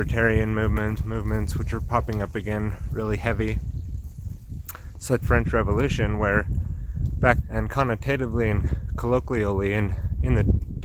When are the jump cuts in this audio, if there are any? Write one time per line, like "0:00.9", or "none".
0:01.0
0:05.2
0:07.4